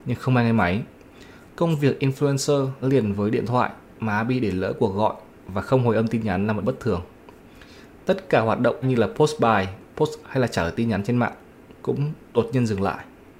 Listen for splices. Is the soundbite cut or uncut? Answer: cut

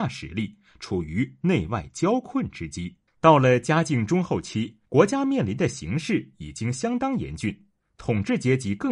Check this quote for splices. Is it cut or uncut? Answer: cut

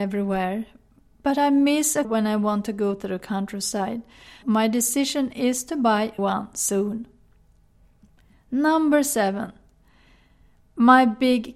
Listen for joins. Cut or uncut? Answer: cut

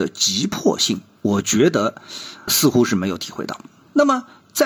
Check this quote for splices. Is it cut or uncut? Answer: cut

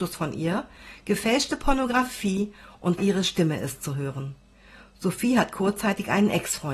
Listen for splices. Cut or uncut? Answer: cut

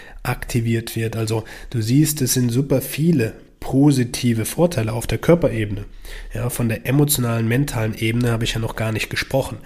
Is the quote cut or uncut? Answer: uncut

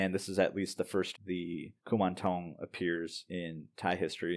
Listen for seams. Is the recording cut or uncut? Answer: cut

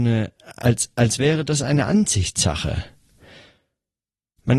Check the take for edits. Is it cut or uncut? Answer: uncut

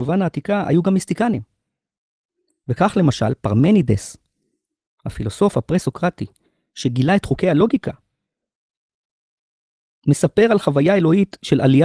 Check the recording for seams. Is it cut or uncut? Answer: uncut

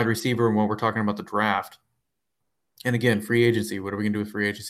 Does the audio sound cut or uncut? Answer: uncut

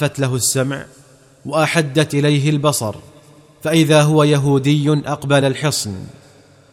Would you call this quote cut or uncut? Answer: cut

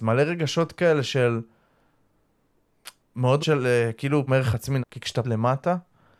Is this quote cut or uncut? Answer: cut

